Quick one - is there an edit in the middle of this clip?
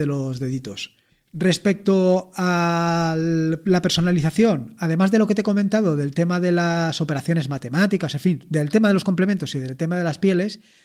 no; 0 cuts

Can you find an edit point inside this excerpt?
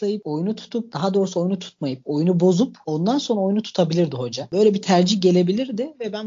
no; 0 cuts

